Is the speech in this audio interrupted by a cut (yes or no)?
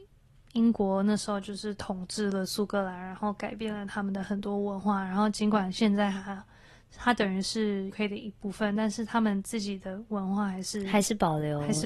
yes